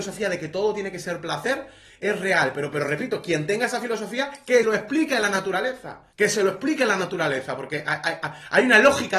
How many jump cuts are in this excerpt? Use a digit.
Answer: 2